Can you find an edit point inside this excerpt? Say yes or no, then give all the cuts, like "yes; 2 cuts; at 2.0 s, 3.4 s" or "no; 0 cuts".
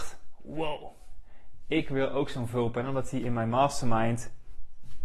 no; 0 cuts